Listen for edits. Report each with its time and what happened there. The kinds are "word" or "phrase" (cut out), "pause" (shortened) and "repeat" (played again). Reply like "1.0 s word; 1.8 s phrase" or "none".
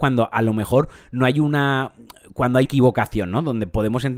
2.6 s word